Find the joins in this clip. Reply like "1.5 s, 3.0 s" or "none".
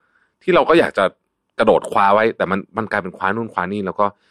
none